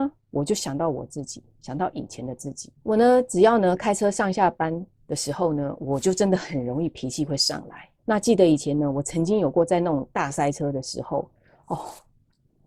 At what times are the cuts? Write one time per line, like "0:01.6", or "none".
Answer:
0:02.7
0:08.0